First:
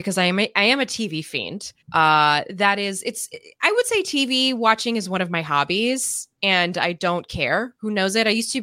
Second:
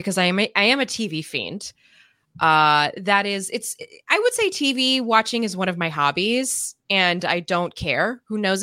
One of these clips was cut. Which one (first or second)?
first